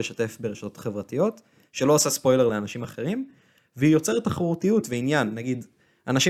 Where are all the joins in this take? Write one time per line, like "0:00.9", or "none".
none